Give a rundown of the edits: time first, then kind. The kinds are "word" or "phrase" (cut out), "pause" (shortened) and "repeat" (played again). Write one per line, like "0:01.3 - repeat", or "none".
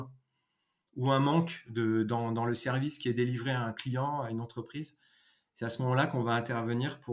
none